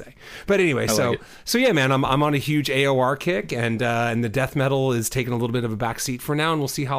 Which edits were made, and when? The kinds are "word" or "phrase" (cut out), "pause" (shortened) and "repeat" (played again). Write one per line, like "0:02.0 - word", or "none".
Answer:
none